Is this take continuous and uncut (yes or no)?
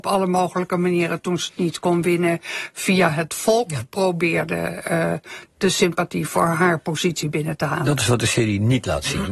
yes